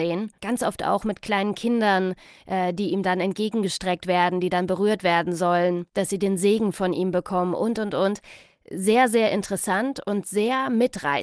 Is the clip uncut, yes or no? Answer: yes